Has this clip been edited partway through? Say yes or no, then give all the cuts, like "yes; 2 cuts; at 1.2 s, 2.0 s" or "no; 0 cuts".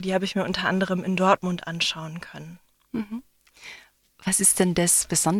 no; 0 cuts